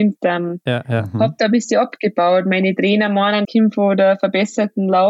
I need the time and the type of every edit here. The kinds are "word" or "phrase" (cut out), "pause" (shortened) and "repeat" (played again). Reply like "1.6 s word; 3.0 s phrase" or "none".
3.4 s word